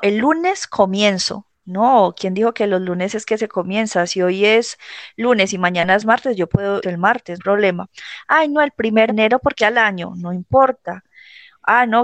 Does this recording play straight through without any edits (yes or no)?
no